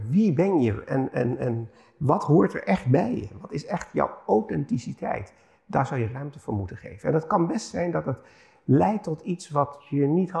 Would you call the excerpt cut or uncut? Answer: uncut